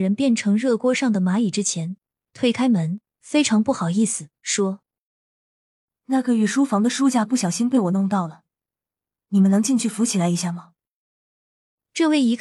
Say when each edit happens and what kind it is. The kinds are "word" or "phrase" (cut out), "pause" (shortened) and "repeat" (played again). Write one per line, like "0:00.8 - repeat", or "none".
none